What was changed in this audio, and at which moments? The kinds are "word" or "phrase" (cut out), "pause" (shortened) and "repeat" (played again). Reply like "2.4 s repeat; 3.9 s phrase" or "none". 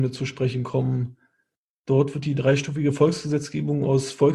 none